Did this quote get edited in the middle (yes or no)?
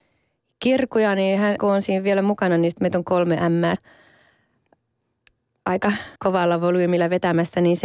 yes